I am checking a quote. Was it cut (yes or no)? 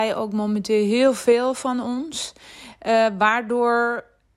no